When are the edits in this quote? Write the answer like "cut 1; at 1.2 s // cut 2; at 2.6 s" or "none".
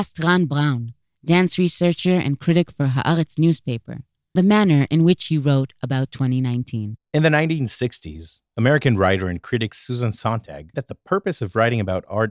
cut 1; at 4.4 s // cut 2; at 7.1 s // cut 3; at 10.7 s